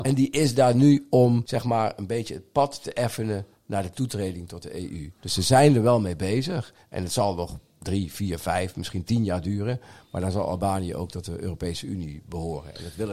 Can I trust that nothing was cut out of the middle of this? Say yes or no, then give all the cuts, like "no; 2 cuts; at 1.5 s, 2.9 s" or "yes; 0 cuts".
yes; 0 cuts